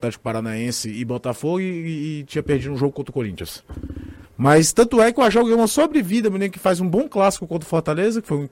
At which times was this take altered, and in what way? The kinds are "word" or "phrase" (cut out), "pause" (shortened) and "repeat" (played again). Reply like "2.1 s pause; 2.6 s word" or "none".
none